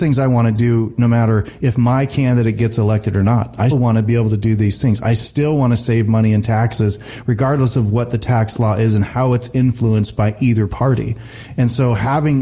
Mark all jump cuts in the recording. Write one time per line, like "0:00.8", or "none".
0:03.7